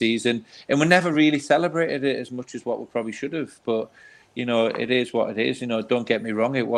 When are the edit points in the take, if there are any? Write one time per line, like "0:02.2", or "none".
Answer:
none